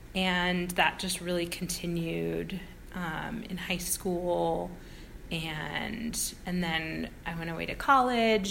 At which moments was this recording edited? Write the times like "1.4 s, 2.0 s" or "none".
none